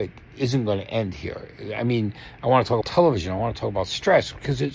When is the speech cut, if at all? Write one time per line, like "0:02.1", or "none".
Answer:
0:02.8